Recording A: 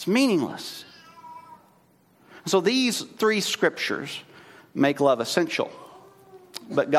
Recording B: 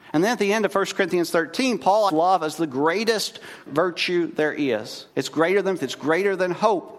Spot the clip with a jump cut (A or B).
B